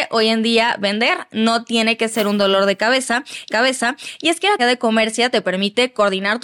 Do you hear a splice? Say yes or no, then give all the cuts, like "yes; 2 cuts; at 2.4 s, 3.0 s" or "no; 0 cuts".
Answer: yes; 2 cuts; at 3.5 s, 4.6 s